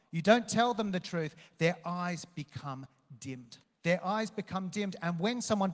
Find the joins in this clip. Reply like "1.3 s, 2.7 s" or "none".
3.6 s